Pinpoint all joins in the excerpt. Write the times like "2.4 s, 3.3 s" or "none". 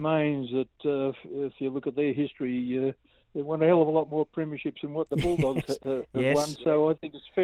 none

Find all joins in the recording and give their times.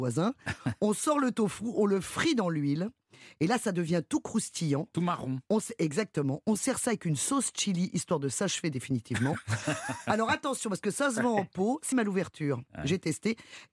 11.9 s

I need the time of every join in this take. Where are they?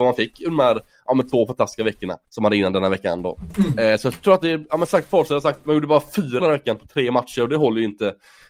2.2 s, 6.4 s

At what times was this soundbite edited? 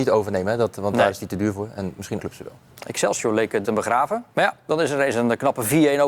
2.2 s, 3.6 s, 4.3 s

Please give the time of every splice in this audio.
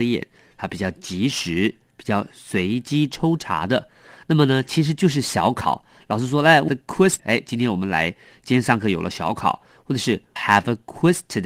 6.7 s, 7.2 s, 10.4 s

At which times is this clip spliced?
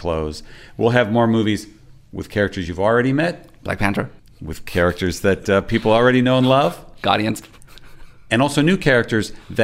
4.2 s

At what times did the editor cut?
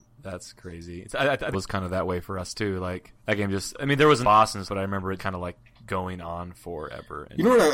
1.5 s, 3.2 s, 4.2 s, 4.6 s, 5.2 s

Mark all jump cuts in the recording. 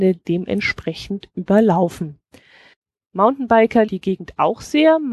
3.9 s

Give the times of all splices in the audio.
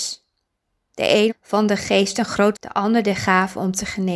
1.3 s, 2.5 s

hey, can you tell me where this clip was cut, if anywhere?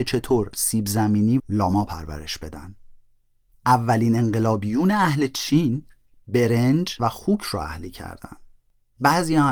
1.4 s, 7.0 s

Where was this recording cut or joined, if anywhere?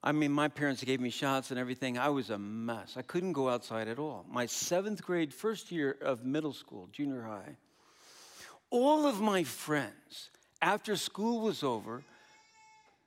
5.3 s

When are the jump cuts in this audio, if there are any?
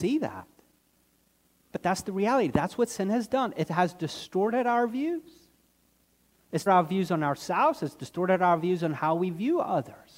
6.7 s

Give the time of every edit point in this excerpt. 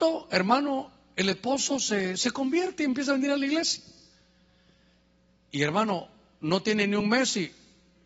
none

